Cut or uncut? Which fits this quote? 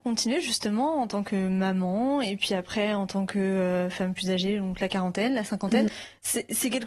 uncut